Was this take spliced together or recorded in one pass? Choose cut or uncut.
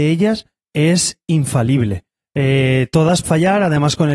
cut